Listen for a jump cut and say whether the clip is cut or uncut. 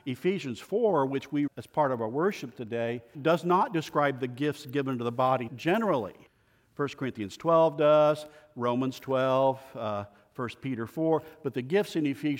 cut